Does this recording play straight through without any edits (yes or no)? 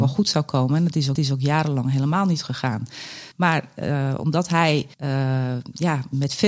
no